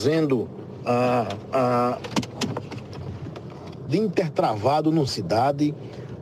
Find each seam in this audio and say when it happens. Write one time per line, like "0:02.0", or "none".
0:03.9
0:05.1

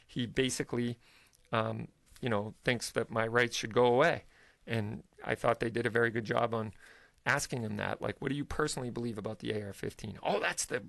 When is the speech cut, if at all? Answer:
none

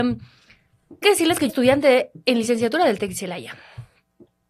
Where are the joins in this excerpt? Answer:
0:01.0
0:01.5

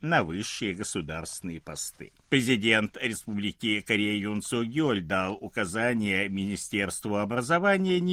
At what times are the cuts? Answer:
0:02.2

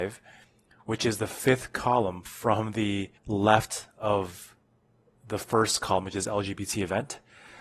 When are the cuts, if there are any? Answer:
0:03.2

